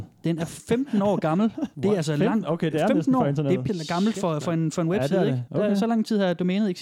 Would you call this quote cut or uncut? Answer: cut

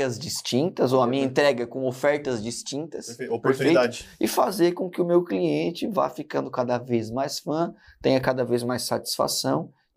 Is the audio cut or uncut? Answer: uncut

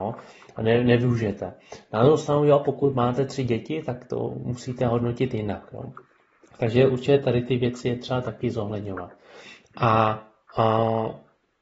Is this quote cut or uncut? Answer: uncut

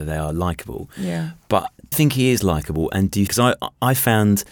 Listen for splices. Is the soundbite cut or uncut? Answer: cut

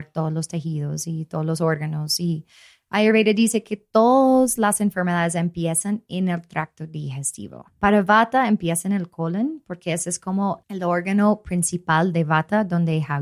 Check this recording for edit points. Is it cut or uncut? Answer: cut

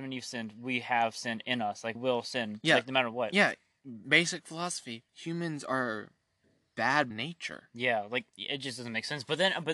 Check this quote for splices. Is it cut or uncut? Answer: cut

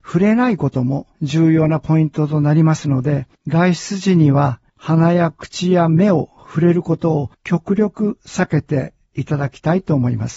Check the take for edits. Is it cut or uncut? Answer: cut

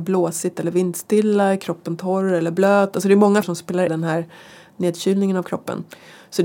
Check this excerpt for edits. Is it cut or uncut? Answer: cut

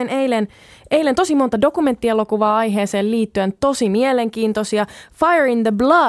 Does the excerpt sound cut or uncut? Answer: uncut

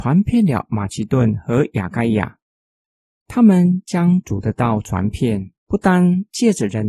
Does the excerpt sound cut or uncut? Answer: uncut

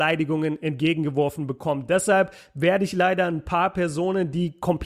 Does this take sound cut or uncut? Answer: uncut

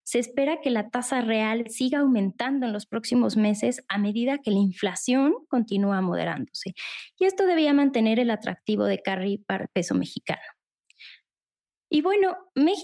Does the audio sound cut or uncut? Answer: uncut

